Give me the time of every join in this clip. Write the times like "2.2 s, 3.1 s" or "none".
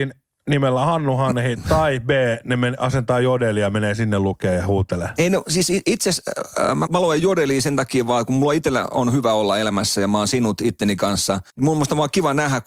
6.9 s, 11.5 s